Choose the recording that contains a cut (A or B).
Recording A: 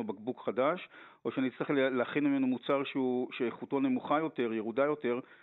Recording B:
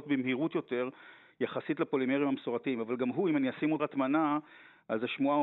B